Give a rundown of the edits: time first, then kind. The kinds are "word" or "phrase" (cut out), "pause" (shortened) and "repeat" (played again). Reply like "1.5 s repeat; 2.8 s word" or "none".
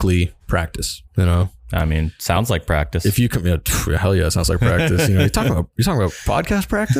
1.1 s pause